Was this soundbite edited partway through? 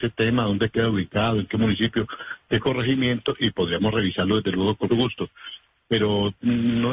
yes; 1 cut; at 4.9 s

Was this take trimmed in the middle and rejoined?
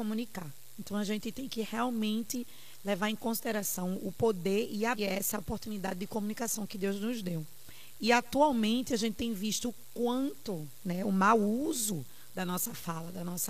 yes; 1 cut; at 5.0 s

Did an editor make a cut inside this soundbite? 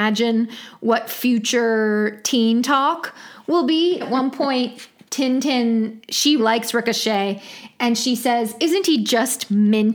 yes; 2 cuts; at 4.0 s, 6.4 s

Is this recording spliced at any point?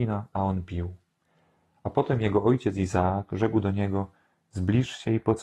no; 0 cuts

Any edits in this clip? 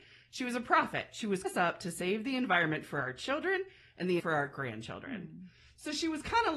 yes; 2 cuts; at 1.4 s, 4.2 s

